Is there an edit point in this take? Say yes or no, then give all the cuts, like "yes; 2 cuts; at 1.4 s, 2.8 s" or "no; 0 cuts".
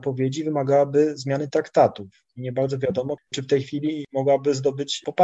no; 0 cuts